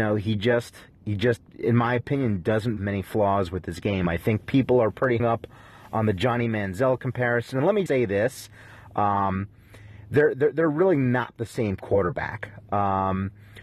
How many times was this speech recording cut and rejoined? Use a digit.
4